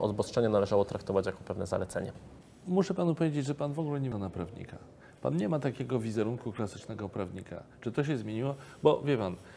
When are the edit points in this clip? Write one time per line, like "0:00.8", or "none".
0:04.1